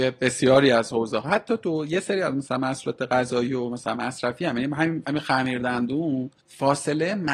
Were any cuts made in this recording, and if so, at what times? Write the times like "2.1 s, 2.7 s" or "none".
6.4 s